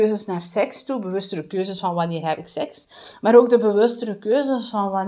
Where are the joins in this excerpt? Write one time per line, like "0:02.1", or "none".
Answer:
none